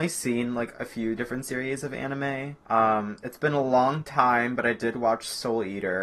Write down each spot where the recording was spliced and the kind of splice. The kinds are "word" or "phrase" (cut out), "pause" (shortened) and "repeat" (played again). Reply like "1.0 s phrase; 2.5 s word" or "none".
2.6 s pause

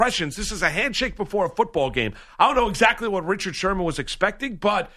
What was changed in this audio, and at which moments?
none

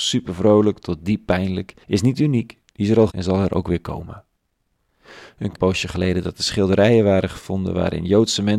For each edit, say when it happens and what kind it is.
1.8 s pause; 3.1 s word; 5.5 s phrase

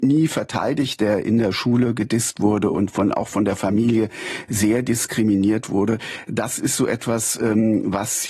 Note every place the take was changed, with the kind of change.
none

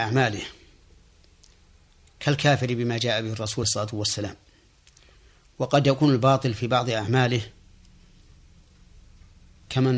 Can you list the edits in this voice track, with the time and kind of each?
3.6 s word

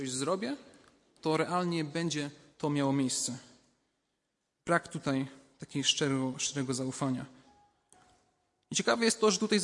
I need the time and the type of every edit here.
none

